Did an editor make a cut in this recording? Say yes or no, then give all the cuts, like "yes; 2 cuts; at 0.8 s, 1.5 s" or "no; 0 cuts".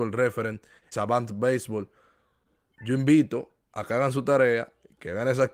yes; 1 cut; at 0.9 s